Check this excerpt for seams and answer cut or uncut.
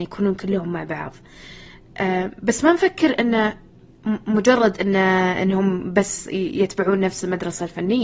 uncut